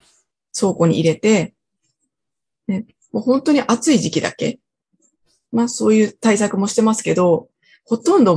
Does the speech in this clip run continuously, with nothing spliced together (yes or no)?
yes